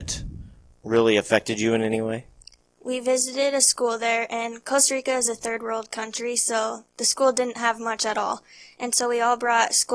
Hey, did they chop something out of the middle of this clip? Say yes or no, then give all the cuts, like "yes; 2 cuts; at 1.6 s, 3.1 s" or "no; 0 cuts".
no; 0 cuts